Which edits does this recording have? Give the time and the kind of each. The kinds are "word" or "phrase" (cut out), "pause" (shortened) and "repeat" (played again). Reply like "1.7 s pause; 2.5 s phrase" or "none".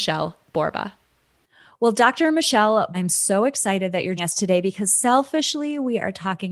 2.9 s word; 4.2 s word